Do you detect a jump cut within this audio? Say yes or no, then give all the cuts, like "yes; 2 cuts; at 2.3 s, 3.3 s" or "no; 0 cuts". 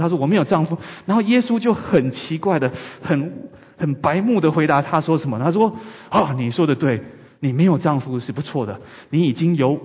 no; 0 cuts